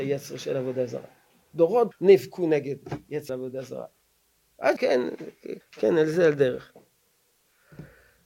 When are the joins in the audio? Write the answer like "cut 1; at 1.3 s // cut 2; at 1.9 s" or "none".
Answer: cut 1; at 1.9 s // cut 2; at 3.3 s // cut 3; at 4.8 s // cut 4; at 5.6 s

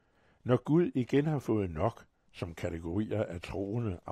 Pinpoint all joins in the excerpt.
none

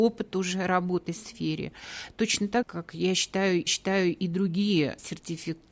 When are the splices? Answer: cut 1; at 1.1 s // cut 2; at 2.6 s // cut 3; at 3.7 s

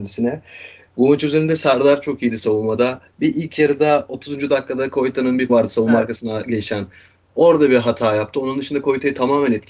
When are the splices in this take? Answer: cut 1; at 5.5 s

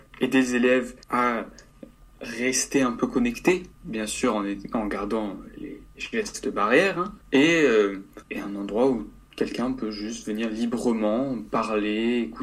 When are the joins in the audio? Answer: cut 1; at 1.0 s // cut 2; at 3.7 s // cut 3; at 7.2 s // cut 4; at 8.2 s

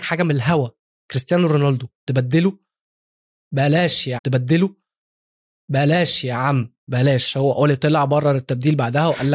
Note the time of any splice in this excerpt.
cut 1; at 4.2 s

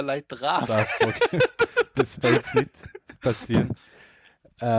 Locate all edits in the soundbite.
cut 1; at 2.2 s

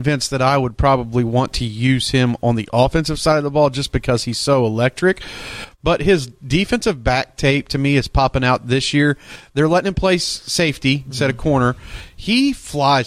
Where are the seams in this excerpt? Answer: none

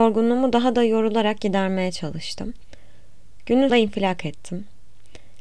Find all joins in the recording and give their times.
cut 1; at 3.7 s

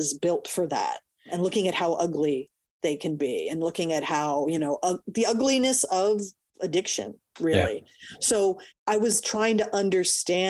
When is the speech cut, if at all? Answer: none

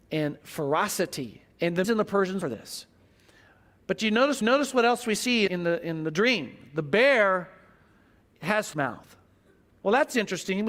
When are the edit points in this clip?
cut 1; at 1.5 s // cut 2; at 1.8 s // cut 3; at 2.4 s // cut 4; at 4.4 s // cut 5; at 5.5 s // cut 6; at 8.7 s

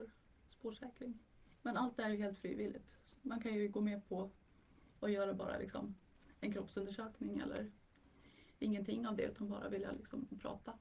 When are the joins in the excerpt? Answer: cut 1; at 3.2 s

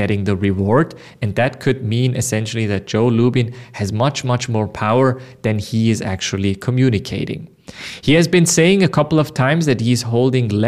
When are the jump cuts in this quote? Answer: none

